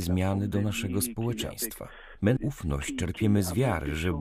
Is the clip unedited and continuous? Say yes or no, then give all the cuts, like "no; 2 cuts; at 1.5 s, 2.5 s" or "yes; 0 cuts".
no; 1 cut; at 2.4 s